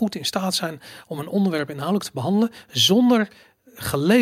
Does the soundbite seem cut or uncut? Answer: uncut